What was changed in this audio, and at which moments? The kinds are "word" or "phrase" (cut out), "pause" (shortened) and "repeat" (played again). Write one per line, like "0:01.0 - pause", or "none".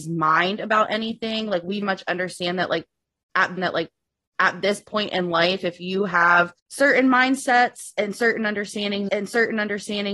0:01.8 - word
0:03.6 - repeat
0:06.6 - pause
0:09.1 - repeat

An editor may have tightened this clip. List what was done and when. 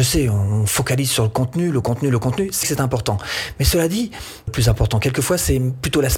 0:02.6 - word
0:04.5 - phrase

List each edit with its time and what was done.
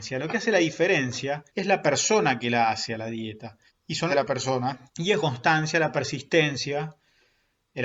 0:01.5 - pause
0:03.7 - pause
0:04.1 - phrase
0:04.9 - pause
0:05.2 - phrase

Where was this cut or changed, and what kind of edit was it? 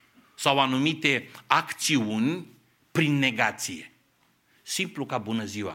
none

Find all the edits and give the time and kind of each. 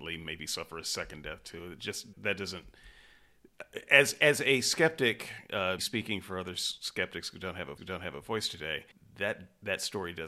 0:02.1 - word
0:05.8 - word
0:07.8 - repeat
0:08.9 - pause

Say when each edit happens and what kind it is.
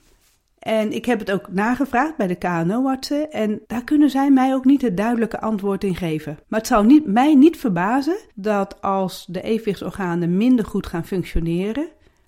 0:03.6 - pause
0:06.4 - pause
0:08.3 - pause

